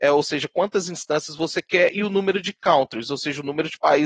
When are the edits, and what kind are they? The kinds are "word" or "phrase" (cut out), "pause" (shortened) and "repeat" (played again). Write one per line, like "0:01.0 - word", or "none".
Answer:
none